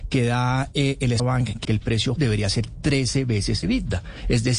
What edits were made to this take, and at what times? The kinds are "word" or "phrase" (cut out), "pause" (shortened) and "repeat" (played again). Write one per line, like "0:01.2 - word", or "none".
0:01.2 - word
0:01.6 - word
0:02.2 - word
0:03.6 - word